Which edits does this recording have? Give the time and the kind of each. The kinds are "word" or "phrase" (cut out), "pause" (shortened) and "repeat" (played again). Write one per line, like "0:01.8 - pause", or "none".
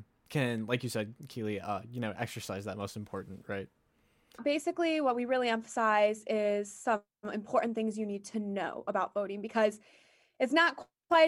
none